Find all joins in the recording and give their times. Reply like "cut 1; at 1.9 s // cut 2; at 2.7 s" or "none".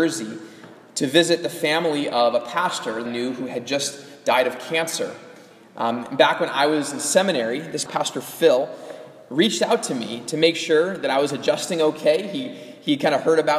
cut 1; at 3.1 s // cut 2; at 7.9 s